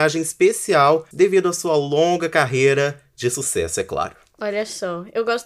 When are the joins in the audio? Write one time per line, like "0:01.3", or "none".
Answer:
0:01.1